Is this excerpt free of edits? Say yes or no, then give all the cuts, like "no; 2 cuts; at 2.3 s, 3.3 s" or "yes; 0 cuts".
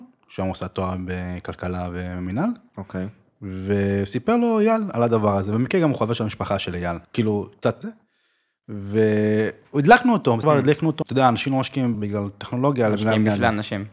no; 5 cuts; at 7.0 s, 7.8 s, 10.4 s, 11.0 s, 11.9 s